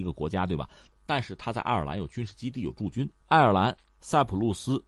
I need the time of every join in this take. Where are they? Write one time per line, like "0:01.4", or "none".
0:03.2